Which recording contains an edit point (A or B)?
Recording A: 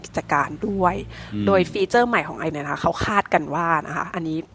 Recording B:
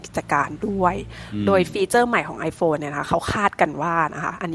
A